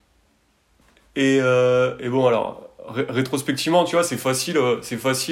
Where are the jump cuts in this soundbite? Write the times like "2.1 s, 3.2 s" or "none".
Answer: none